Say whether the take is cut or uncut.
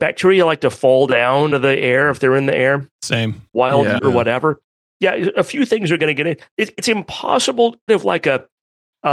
cut